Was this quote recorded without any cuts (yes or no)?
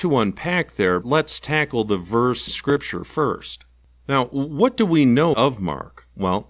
no